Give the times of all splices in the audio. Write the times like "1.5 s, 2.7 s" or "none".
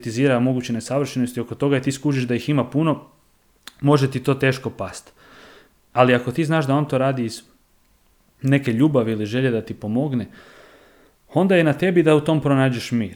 none